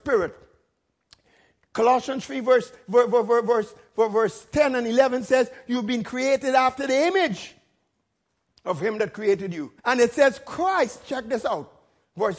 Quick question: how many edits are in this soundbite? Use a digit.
1